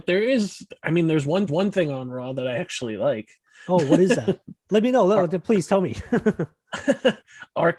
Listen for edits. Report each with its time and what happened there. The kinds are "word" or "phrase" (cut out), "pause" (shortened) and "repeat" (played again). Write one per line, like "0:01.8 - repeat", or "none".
0:01.5 - repeat